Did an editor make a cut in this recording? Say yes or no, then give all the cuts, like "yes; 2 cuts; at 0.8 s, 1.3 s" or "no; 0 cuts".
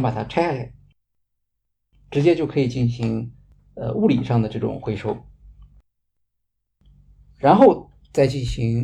no; 0 cuts